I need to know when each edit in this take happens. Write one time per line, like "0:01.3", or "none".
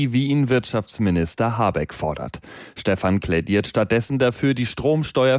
0:03.2